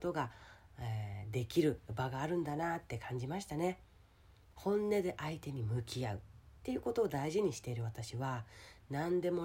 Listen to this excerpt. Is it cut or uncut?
uncut